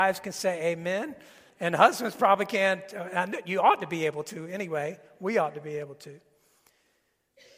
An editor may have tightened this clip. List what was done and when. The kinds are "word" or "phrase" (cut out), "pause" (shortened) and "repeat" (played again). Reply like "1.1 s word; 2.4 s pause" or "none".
1.5 s pause